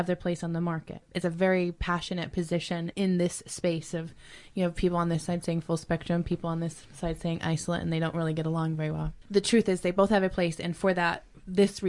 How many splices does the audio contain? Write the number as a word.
zero